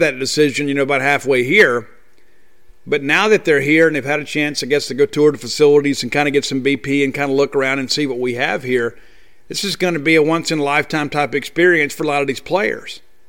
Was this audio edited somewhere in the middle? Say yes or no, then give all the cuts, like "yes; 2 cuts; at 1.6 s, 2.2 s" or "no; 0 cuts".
no; 0 cuts